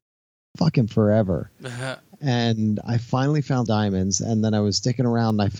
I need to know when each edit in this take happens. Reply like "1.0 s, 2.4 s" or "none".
3.7 s